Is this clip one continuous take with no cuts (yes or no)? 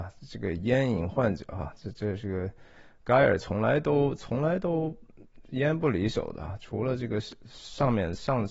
yes